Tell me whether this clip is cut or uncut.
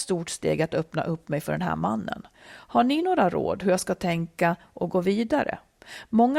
uncut